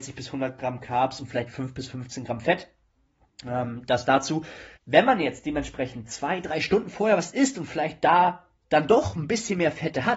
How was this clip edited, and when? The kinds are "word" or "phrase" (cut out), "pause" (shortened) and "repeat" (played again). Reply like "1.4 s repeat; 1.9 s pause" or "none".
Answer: 4.8 s pause